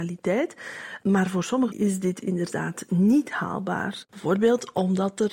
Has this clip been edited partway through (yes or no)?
yes